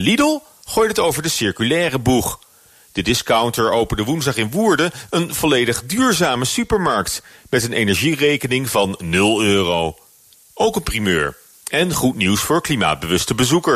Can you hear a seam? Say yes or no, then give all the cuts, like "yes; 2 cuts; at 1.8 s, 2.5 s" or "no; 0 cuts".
no; 0 cuts